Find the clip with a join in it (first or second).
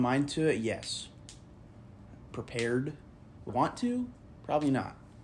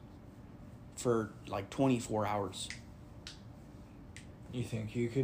first